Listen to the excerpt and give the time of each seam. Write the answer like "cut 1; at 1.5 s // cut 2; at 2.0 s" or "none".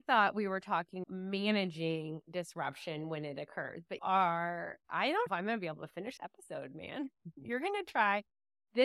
cut 1; at 1.0 s // cut 2; at 4.0 s // cut 3; at 4.8 s // cut 4; at 5.3 s // cut 5; at 6.2 s